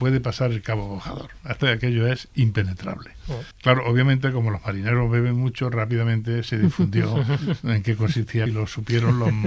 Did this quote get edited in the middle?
yes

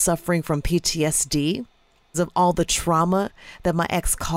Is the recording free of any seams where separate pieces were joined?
no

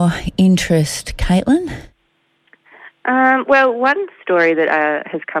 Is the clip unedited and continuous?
yes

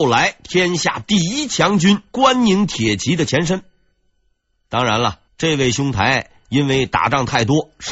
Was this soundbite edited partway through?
yes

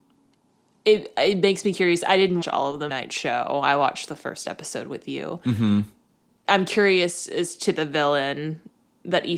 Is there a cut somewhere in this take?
yes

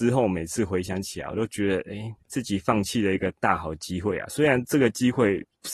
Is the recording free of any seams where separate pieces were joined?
no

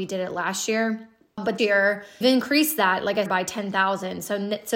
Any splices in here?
yes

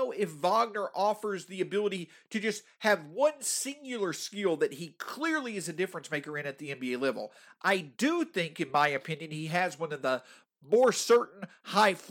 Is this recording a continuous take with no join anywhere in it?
yes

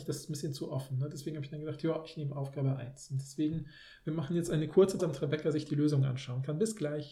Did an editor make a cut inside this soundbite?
yes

